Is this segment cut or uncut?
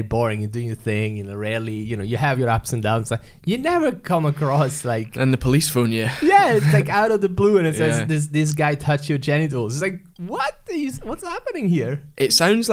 uncut